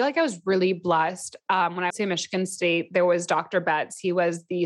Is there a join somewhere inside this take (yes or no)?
yes